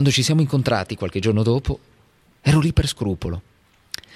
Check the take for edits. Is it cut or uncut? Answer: uncut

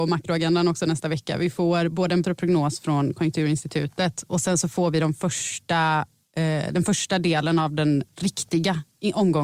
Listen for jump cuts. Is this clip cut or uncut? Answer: cut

